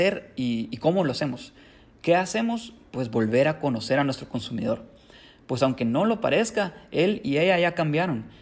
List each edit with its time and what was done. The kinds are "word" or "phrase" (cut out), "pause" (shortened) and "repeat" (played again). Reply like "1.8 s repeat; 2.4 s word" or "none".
none